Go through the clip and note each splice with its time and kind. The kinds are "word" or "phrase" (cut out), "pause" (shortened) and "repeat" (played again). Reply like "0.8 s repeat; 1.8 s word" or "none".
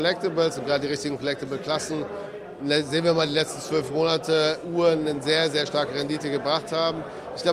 none